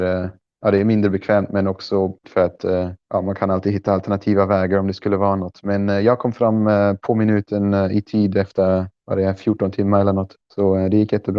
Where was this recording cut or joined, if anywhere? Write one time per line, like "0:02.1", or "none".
0:02.2
0:03.0